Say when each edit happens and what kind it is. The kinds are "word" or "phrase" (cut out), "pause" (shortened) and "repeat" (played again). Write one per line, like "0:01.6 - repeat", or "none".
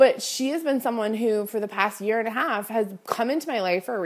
none